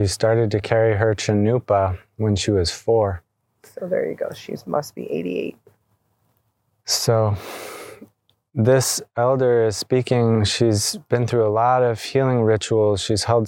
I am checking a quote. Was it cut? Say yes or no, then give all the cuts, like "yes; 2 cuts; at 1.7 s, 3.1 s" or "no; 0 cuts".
no; 0 cuts